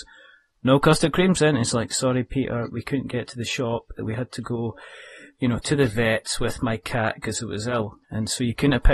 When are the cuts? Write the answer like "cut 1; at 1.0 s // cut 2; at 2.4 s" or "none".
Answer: cut 1; at 8.0 s